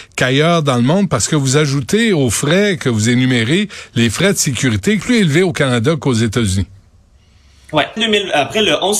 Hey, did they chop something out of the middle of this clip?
yes; 2 cuts; at 5.0 s, 8.0 s

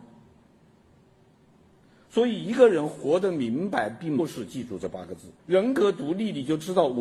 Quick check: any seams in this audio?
yes; 1 cut; at 5.4 s

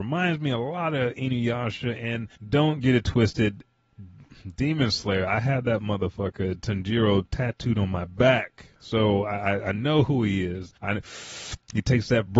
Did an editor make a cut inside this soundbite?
yes; 2 cuts; at 2.4 s, 10.8 s

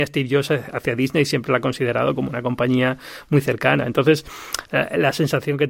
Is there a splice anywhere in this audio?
no; 0 cuts

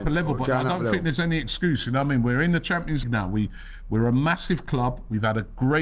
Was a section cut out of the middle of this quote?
yes; 1 cut; at 3.0 s

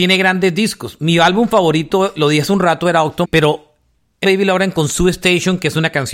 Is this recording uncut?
no; 2 cuts; at 3.2 s, 4.2 s

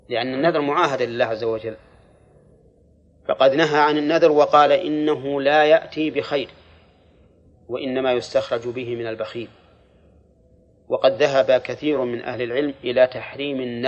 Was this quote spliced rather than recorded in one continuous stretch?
no; 0 cuts

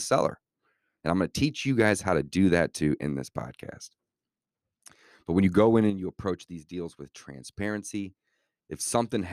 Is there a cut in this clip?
no; 0 cuts

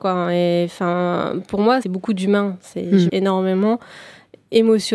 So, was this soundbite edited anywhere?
yes; 2 cuts; at 1.8 s, 3.1 s

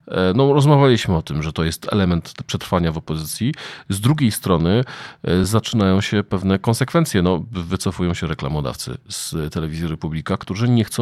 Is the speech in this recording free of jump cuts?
yes; 0 cuts

